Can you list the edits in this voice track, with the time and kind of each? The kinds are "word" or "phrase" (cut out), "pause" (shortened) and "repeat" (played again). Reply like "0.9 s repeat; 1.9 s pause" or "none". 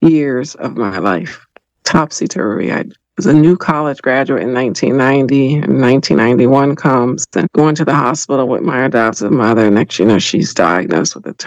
none